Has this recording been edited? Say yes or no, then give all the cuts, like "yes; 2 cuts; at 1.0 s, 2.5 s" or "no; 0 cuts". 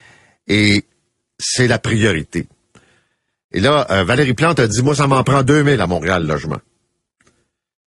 no; 0 cuts